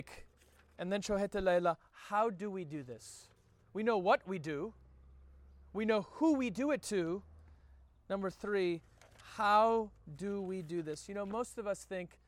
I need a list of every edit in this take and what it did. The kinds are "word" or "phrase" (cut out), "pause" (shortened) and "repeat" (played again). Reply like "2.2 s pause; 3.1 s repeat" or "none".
none